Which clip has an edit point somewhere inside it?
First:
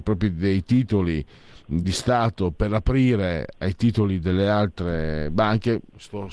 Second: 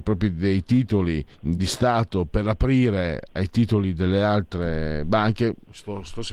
second; 1 cut; at 1.3 s

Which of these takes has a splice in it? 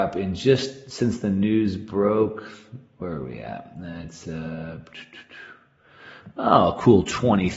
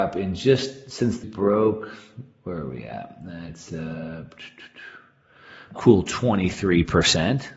second; 2 cuts; at 1.2 s, 5.8 s

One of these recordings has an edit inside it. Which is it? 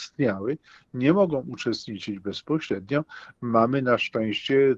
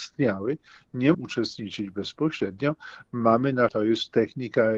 second; 2 cuts; at 1.1 s, 3.7 s

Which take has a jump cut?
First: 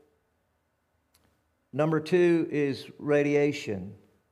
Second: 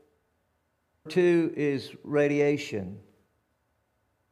second; 1 cut; at 1.1 s

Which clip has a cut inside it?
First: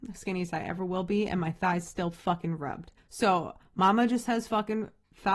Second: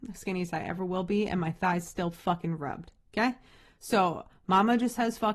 first; 1 cut; at 3.0 s

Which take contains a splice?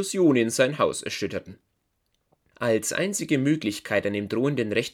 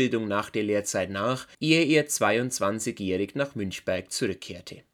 second; 1 cut; at 1.5 s

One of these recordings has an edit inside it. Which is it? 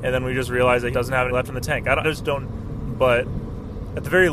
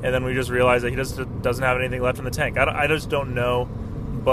first; 4 cuts; at 0.9 s, 1.3 s, 2.0 s, 2.4 s

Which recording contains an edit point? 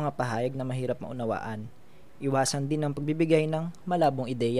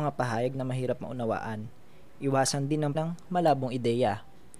second; 1 cut; at 2.9 s

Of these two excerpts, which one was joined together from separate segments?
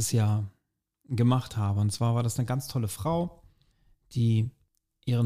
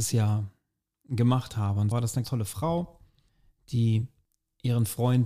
second; 2 cuts; at 1.9 s, 2.2 s

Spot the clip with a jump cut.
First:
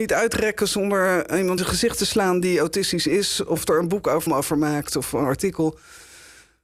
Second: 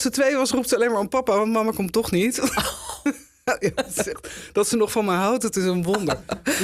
first; 2 cuts; at 1.6 s, 4.3 s

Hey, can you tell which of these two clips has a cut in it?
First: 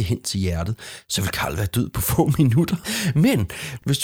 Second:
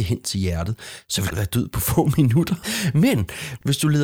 second; 1 cut; at 1.3 s

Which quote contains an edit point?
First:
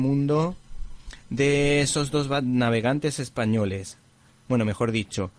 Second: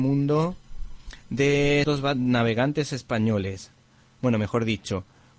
second; 1 cut; at 1.8 s

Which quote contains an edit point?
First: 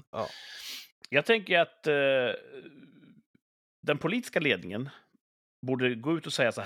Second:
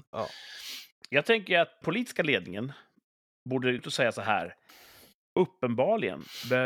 second; 2 cuts; at 1.8 s, 3.8 s

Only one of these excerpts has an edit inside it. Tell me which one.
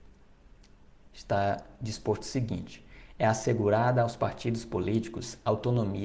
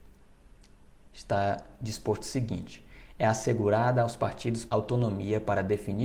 second; 1 cut; at 4.7 s

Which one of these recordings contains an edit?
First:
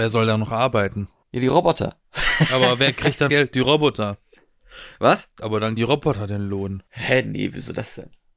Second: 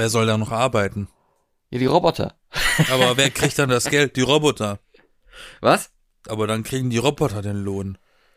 first; 5 cuts; at 1.2 s, 3.3 s, 5.3 s, 5.8 s, 6.9 s

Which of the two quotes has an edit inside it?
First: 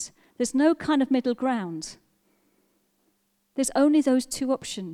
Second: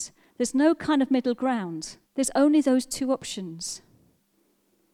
second; 1 cut; at 2.0 s

